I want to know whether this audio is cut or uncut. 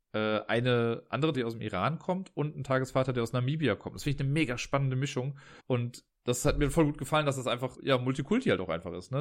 cut